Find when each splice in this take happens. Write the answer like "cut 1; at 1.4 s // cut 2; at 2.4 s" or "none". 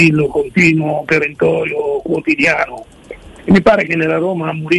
none